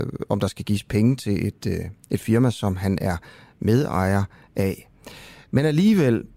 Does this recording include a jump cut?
no; 0 cuts

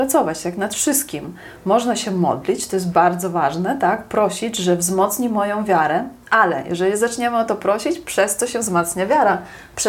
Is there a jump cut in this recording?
no; 0 cuts

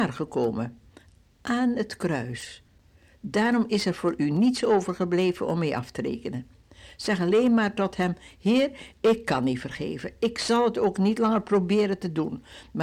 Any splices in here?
no; 0 cuts

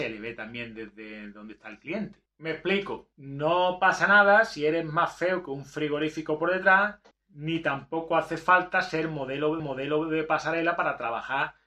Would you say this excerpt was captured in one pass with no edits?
no; 4 cuts; at 2.3 s, 3.1 s, 7.1 s, 9.6 s

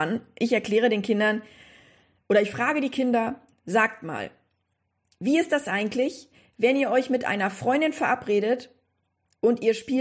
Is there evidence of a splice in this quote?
no; 0 cuts

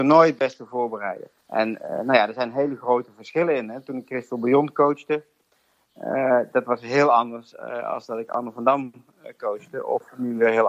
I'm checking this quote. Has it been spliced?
yes; 1 cut; at 1.4 s

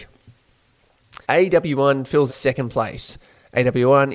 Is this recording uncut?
no; 2 cuts; at 1.2 s, 2.3 s

